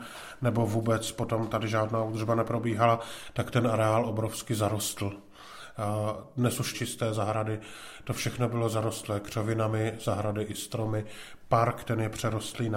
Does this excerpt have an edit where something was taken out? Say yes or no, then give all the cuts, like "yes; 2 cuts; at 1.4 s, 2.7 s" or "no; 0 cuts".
yes; 1 cut; at 6.7 s